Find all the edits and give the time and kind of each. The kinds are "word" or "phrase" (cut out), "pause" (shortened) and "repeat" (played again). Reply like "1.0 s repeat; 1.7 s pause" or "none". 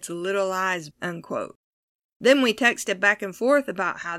0.9 s word